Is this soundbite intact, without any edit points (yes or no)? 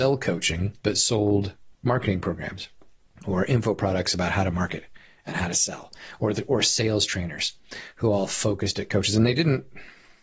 yes